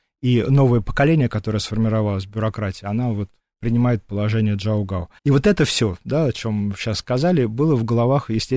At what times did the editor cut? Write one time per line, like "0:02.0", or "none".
0:03.4
0:05.2